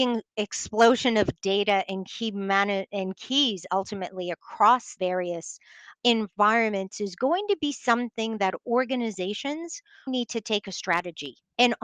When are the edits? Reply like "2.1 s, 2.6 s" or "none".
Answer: 5.0 s, 10.1 s